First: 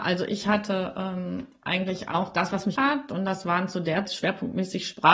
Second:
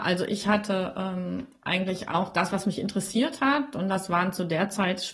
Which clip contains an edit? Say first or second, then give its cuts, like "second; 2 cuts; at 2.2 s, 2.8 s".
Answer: first; 2 cuts; at 2.8 s, 4.1 s